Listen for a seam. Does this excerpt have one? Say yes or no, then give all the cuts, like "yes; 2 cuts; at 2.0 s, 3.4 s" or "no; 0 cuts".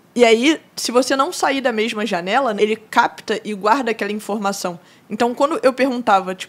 yes; 1 cut; at 2.6 s